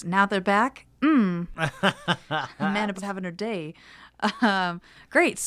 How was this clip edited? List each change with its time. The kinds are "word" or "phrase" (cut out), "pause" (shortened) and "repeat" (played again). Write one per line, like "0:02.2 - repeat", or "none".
0:02.9 - word